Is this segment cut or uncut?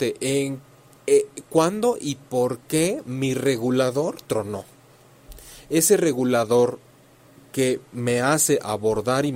uncut